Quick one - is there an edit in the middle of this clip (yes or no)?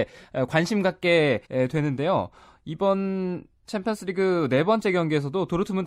yes